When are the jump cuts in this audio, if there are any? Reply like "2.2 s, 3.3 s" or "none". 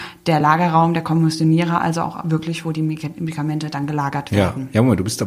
none